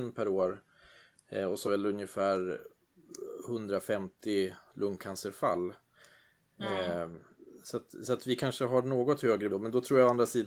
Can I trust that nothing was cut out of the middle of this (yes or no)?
no